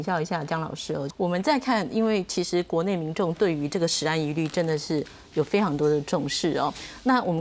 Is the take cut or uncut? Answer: cut